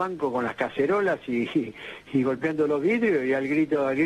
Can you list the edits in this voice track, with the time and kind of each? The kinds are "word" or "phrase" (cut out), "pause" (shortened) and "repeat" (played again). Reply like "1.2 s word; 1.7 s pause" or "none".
none